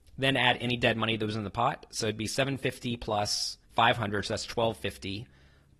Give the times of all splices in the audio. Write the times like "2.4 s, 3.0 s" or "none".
3.6 s